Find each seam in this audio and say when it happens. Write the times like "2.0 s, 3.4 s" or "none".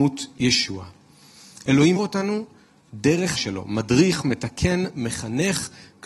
2.0 s, 3.4 s, 4.2 s